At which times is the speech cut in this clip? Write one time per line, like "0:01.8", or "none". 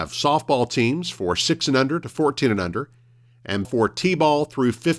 0:03.6